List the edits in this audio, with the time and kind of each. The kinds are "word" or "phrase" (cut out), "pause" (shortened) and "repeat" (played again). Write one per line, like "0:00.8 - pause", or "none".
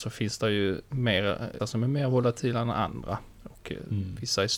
0:01.6 - word